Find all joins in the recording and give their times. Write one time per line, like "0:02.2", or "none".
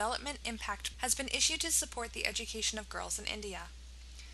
0:00.9